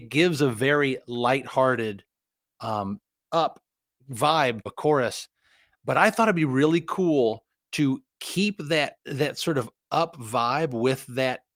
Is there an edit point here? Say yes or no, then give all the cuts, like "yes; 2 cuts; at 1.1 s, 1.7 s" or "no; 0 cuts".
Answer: yes; 2 cuts; at 4.7 s, 9.0 s